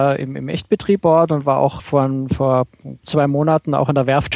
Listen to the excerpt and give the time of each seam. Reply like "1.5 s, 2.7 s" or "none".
1.0 s, 1.8 s, 3.0 s